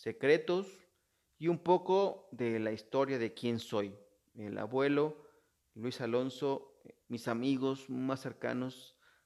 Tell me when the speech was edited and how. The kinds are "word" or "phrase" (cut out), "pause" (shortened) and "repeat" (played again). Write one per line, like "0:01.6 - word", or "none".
none